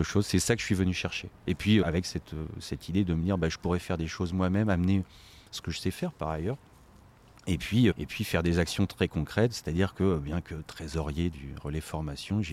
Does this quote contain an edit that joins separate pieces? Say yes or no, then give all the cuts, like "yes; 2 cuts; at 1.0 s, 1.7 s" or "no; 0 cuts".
yes; 2 cuts; at 1.8 s, 7.9 s